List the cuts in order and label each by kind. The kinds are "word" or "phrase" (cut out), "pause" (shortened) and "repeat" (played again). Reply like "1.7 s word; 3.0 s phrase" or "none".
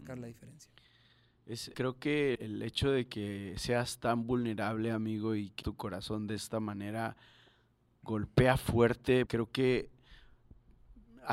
1.7 s word; 2.4 s word; 5.6 s word; 9.3 s word